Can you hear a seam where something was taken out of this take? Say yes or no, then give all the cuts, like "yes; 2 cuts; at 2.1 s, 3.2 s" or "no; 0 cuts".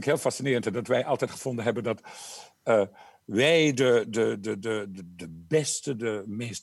no; 0 cuts